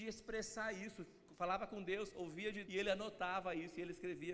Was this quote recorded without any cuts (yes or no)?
no